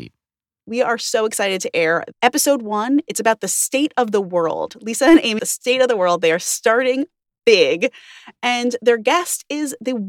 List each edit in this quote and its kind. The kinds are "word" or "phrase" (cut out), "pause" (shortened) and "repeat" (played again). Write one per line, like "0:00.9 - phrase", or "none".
0:05.4 - phrase